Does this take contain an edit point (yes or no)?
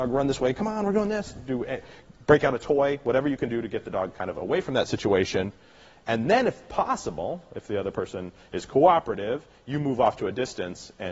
no